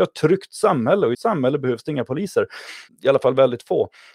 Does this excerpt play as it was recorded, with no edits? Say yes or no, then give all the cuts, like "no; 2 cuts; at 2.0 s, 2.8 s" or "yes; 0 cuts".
no; 2 cuts; at 1.1 s, 2.9 s